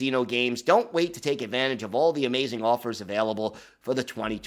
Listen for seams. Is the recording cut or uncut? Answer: uncut